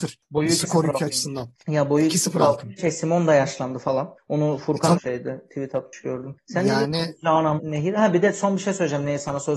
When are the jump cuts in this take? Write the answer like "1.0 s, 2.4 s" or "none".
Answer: 2.8 s, 4.9 s, 7.6 s